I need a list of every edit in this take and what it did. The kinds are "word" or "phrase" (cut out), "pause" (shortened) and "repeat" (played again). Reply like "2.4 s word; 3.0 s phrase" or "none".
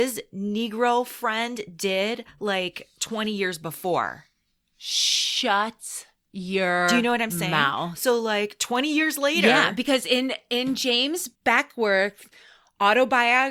11.3 s pause